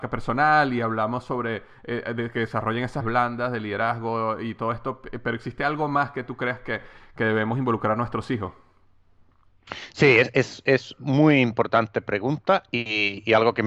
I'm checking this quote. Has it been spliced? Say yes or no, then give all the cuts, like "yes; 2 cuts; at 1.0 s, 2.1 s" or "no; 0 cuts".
yes; 1 cut; at 3.0 s